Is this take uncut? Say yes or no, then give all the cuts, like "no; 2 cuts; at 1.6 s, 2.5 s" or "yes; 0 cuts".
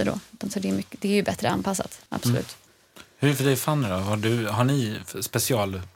no; 2 cuts; at 2.1 s, 3.1 s